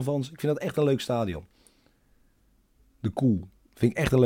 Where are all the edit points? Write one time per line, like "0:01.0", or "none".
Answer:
none